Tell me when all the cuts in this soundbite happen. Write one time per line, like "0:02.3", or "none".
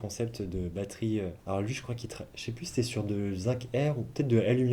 0:01.4